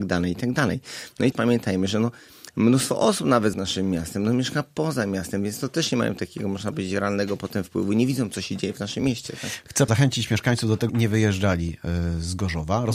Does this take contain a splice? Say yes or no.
yes